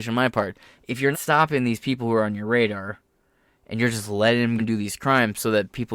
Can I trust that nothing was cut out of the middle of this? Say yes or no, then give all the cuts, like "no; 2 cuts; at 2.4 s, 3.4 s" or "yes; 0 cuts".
no; 2 cuts; at 1.1 s, 4.6 s